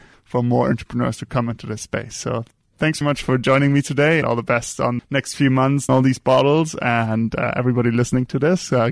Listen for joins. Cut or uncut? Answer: cut